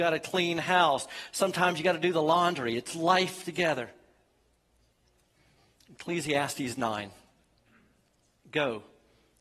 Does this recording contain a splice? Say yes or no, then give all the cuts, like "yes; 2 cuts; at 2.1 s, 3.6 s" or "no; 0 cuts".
no; 0 cuts